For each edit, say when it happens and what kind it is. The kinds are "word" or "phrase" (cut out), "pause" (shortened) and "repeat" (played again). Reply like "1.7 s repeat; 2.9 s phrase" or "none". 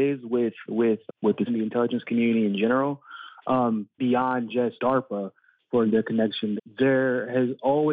1.1 s word; 1.5 s word; 4.0 s word; 4.8 s word; 5.9 s word; 6.6 s word